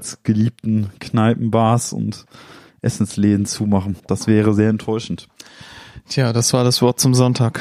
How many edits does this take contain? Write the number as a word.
one